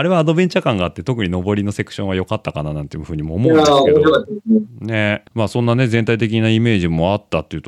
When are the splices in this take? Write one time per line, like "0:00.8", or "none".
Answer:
0:05.3